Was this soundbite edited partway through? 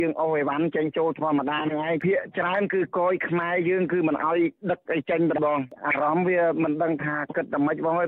yes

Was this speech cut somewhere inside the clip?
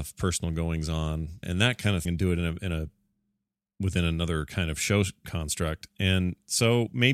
yes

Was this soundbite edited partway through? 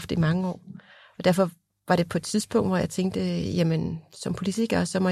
no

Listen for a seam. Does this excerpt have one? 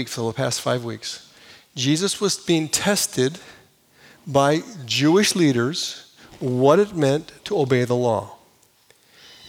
no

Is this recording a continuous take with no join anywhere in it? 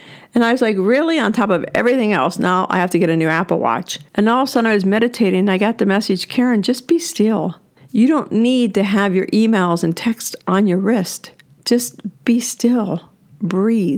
no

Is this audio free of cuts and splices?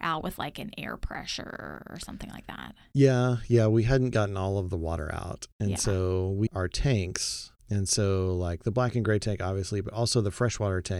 no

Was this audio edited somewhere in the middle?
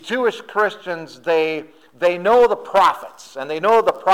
no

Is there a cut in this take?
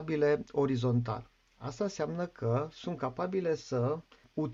no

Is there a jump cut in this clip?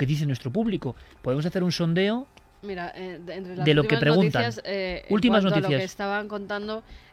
no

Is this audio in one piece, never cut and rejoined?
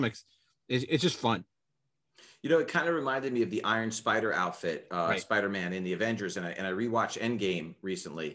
yes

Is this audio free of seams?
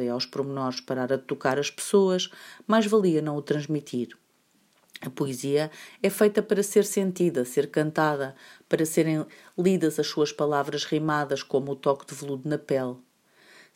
yes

